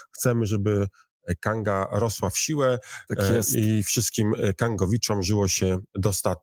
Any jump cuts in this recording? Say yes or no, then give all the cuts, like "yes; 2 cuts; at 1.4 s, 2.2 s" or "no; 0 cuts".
no; 0 cuts